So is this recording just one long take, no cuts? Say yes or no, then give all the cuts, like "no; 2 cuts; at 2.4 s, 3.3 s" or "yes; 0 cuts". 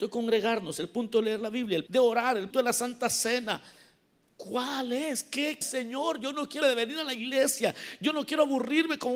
no; 4 cuts; at 1.9 s, 2.5 s, 5.6 s, 6.6 s